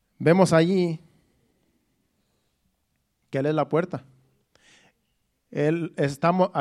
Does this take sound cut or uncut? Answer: uncut